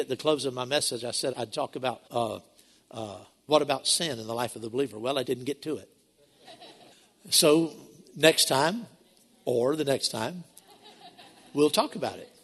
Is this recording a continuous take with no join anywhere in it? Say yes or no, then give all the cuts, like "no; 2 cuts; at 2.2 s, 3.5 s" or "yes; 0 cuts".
no; 4 cuts; at 1.3 s, 2.1 s, 5.2 s, 6.9 s